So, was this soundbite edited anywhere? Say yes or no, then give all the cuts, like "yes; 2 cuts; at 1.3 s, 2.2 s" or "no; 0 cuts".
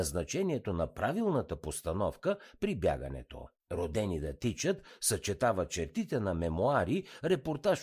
yes; 1 cut; at 3.6 s